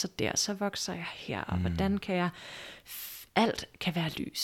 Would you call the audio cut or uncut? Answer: uncut